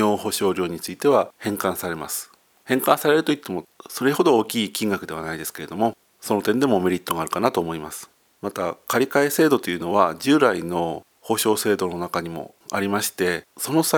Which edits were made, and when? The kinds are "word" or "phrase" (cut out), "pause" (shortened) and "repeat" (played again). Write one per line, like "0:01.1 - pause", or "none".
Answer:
none

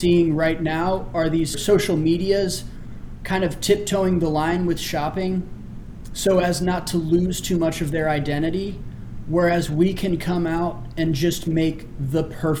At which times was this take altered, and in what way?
none

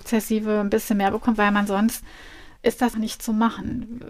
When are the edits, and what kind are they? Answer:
0:02.9 - word

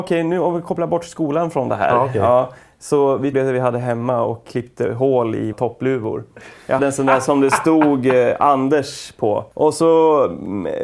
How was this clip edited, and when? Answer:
0:03.3 - word
0:05.5 - word
0:06.8 - word

